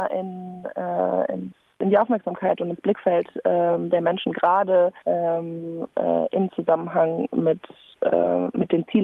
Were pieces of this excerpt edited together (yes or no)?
yes